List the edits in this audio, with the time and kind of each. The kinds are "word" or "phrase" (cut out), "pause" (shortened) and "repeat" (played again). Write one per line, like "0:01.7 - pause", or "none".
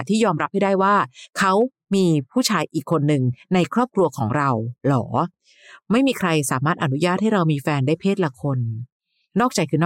none